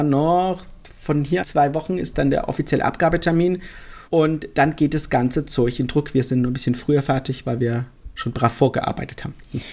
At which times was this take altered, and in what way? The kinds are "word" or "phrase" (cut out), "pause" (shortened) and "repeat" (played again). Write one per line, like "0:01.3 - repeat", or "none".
0:01.4 - phrase
0:04.1 - pause